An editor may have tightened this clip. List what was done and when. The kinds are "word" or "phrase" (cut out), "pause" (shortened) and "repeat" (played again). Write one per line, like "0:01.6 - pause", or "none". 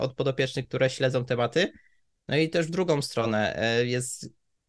none